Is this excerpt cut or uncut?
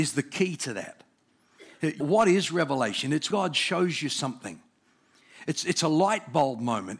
cut